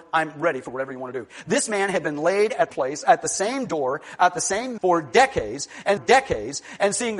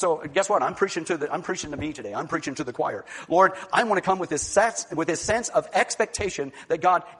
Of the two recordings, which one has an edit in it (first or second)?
first